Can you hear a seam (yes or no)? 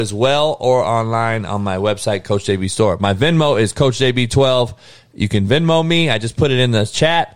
no